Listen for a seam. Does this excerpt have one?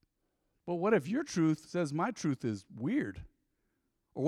no; 0 cuts

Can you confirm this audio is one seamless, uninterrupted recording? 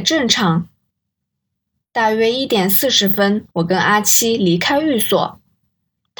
no; 1 cut; at 3.5 s

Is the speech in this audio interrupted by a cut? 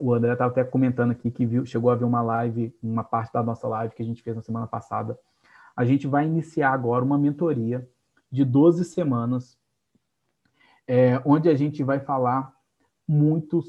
no; 0 cuts

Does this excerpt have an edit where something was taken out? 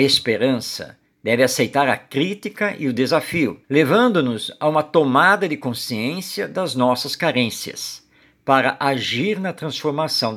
yes; 1 cut; at 3.6 s

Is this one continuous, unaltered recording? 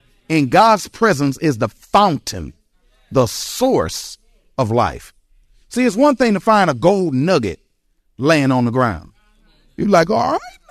yes; 0 cuts

